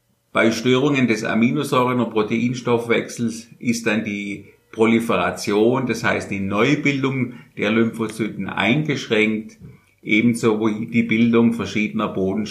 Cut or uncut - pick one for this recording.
uncut